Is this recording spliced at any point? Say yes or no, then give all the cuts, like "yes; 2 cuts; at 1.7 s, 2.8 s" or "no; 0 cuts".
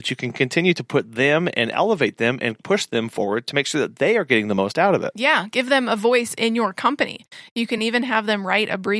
no; 0 cuts